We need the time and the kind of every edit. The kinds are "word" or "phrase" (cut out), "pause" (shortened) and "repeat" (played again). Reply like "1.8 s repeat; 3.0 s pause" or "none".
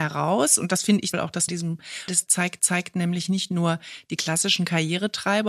1.1 s phrase; 1.5 s phrase; 2.1 s word; 2.6 s repeat